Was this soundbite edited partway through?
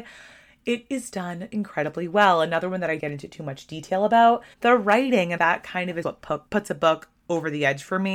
yes; 7 cuts; at 1.1 s, 1.5 s, 3.0 s, 4.5 s, 5.4 s, 6.0 s, 6.5 s

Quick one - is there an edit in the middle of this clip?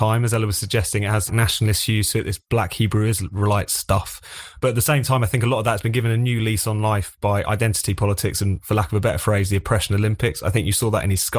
yes; 1 cut; at 1.3 s

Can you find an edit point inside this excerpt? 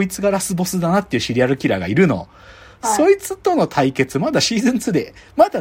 no; 0 cuts

